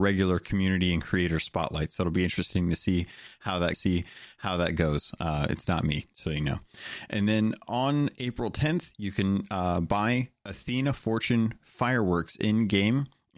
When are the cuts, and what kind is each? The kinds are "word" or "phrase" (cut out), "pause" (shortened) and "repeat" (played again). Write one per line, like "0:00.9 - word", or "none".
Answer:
0:03.7 - repeat
0:06.1 - word